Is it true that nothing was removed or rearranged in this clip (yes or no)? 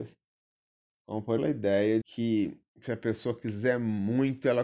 no